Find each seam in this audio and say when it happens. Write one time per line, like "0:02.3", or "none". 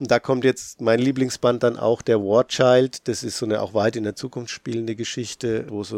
none